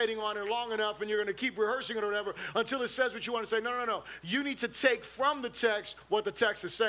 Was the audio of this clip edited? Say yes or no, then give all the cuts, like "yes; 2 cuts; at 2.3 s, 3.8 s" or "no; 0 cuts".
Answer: no; 0 cuts